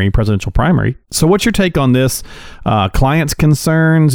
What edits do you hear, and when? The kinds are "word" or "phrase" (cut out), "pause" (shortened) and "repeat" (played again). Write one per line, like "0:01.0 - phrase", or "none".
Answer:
0:01.0 - pause